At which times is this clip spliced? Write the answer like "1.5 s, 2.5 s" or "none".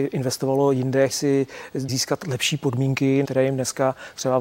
1.1 s, 1.9 s, 3.2 s